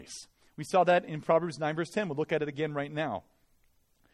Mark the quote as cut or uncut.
uncut